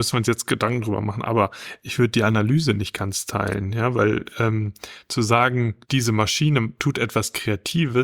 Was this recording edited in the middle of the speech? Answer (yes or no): yes